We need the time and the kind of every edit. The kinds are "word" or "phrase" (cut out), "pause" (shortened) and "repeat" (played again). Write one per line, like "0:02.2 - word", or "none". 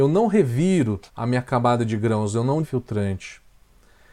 0:01.1 - pause
0:02.6 - phrase